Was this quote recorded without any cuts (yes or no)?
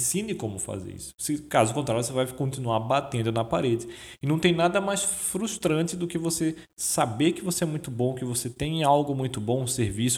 yes